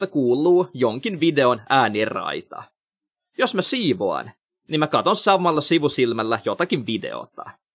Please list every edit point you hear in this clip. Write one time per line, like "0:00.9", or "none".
none